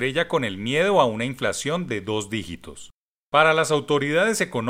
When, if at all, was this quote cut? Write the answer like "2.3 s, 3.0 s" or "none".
none